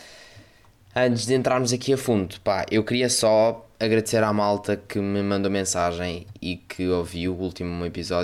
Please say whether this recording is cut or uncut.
uncut